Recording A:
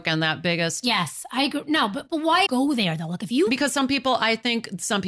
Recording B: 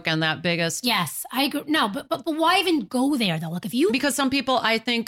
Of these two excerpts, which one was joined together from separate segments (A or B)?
A